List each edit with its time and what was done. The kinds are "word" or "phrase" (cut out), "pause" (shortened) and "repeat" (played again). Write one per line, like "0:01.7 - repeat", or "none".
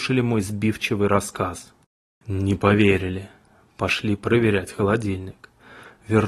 none